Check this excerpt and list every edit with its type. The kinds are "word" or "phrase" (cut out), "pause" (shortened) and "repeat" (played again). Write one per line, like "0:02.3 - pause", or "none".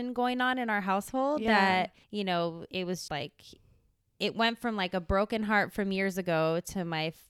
0:02.0 - pause
0:03.1 - word